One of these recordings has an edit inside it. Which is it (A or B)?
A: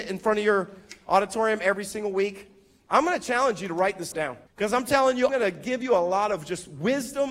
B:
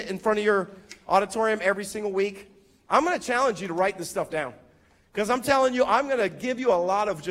A